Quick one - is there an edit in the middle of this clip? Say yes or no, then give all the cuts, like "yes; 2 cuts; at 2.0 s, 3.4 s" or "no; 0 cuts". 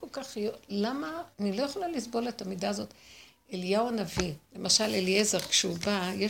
yes; 1 cut; at 1.3 s